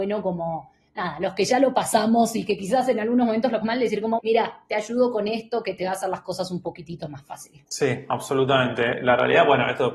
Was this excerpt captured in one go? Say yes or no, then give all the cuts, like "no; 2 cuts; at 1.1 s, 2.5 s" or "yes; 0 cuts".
no; 2 cuts; at 3.6 s, 4.2 s